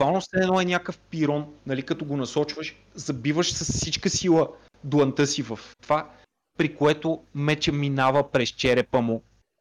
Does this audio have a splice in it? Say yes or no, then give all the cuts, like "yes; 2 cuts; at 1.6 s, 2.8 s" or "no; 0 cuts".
yes; 2 cuts; at 1.6 s, 5.7 s